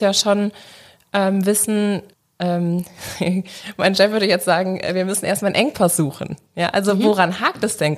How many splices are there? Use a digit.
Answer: 1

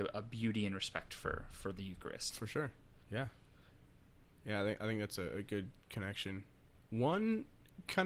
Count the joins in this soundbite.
0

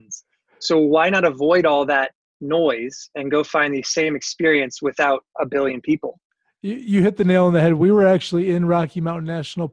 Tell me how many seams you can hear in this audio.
0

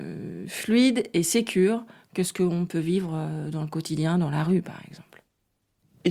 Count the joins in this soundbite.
0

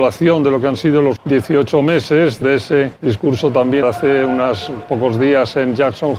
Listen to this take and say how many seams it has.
4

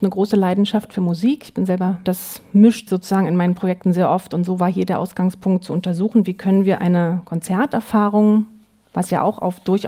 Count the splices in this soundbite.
2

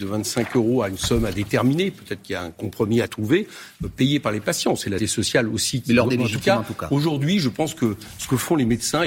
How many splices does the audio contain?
2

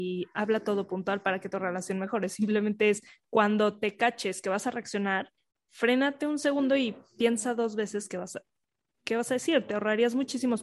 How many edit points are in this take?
0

